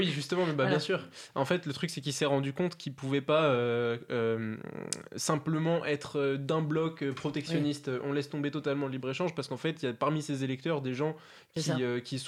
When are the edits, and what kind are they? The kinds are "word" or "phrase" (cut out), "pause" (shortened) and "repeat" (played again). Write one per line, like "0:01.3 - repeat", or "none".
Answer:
none